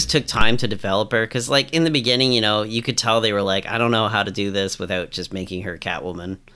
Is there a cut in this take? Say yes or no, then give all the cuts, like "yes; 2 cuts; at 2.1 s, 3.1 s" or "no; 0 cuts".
no; 0 cuts